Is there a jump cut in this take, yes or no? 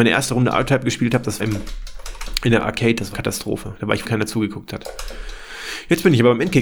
yes